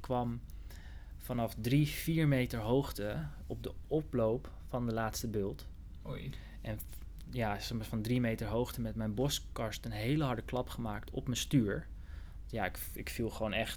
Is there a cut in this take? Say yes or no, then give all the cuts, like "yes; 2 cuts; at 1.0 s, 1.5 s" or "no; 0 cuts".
no; 0 cuts